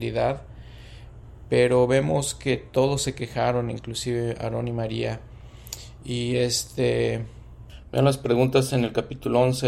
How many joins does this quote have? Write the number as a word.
zero